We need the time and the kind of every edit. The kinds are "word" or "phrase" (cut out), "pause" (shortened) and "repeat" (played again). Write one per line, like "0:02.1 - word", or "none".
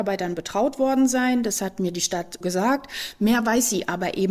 0:02.4 - word